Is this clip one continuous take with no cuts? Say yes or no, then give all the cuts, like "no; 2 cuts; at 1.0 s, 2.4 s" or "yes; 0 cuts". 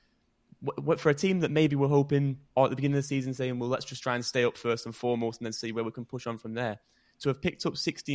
yes; 0 cuts